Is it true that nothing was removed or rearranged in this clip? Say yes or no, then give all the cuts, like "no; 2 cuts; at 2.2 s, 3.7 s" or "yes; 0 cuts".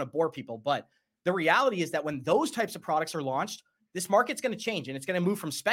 yes; 0 cuts